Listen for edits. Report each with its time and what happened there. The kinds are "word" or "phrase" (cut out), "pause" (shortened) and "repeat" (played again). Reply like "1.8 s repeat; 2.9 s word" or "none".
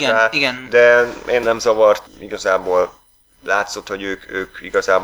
1.4 s word; 2.1 s word

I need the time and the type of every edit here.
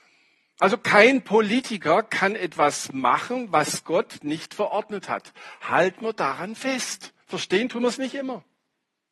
7.2 s pause

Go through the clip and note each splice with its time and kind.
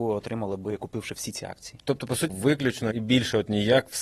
2.3 s word; 2.9 s word

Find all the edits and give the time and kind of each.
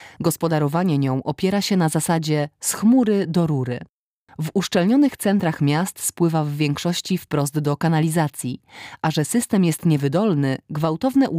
none

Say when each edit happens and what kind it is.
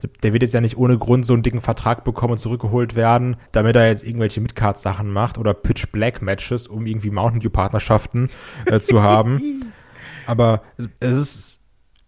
3.5 s pause; 11.0 s pause

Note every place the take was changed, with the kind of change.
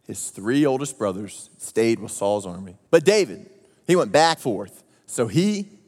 2.9 s pause; 4.4 s word

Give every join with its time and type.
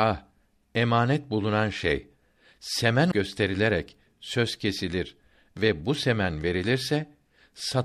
3.1 s word

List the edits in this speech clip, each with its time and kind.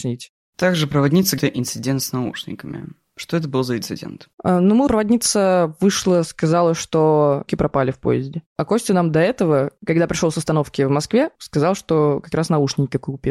1.4 s phrase; 4.3 s pause; 4.9 s word; 7.5 s word; 11.4 s pause

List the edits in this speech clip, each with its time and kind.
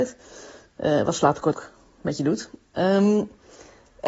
1.5 s word

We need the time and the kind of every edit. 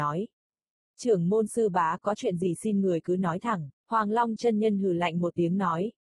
3.8 s pause

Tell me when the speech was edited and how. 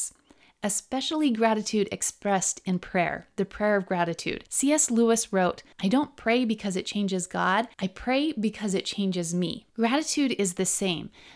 4.5 s pause; 5.7 s pause; 7.7 s pause; 9.7 s pause

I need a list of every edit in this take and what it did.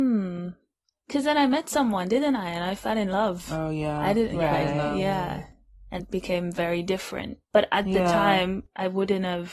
6.0 s word; 7.4 s pause

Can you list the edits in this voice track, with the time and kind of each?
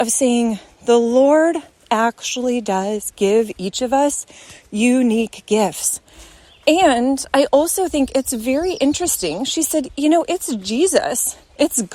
none

